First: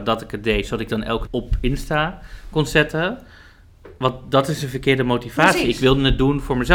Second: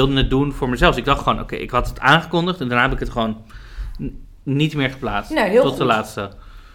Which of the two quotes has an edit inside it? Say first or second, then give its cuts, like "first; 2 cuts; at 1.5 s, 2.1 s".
first; 1 cut; at 1.3 s